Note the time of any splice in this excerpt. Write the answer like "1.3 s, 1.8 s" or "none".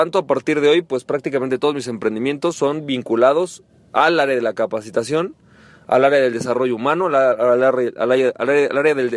none